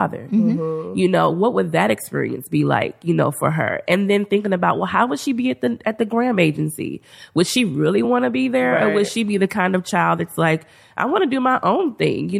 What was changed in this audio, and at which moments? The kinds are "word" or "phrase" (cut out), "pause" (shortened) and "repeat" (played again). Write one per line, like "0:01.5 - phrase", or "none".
none